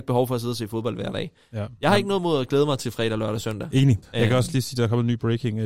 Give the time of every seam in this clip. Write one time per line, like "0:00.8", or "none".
0:04.0